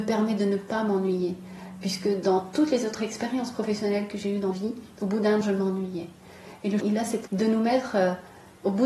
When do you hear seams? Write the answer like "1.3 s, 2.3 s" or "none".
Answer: 4.5 s, 5.4 s, 6.8 s, 7.3 s